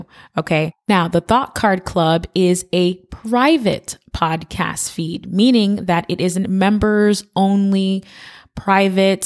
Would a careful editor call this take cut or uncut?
uncut